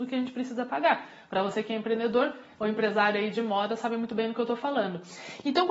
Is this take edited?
no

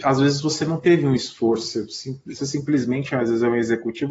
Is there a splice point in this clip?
yes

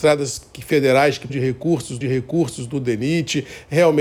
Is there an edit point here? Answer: yes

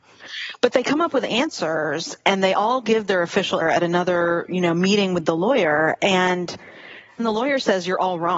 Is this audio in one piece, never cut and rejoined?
no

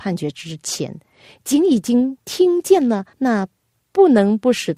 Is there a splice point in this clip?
yes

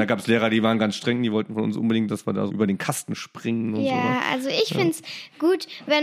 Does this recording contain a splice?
yes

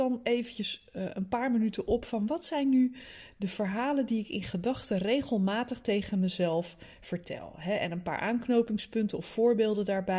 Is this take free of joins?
yes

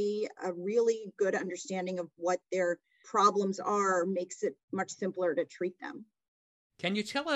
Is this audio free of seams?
no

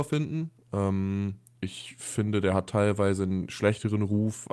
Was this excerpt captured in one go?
yes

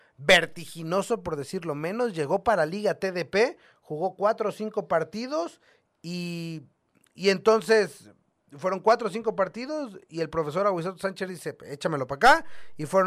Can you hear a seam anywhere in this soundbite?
no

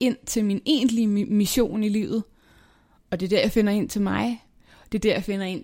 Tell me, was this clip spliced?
no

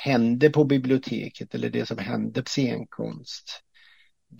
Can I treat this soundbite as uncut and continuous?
no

